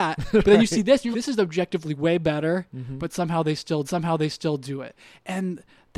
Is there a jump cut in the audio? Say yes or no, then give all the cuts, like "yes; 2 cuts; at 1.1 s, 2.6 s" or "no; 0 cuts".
yes; 2 cuts; at 1.1 s, 3.8 s